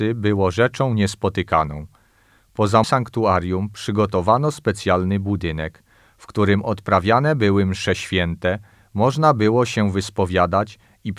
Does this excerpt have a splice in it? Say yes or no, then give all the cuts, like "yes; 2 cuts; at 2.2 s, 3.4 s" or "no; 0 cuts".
yes; 1 cut; at 2.8 s